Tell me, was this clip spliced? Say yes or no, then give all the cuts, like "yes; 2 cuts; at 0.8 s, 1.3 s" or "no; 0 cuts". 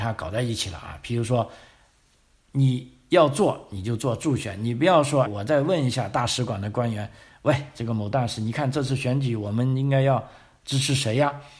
yes; 1 cut; at 5.3 s